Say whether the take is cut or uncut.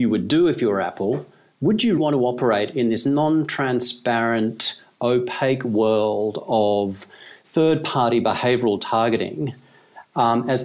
cut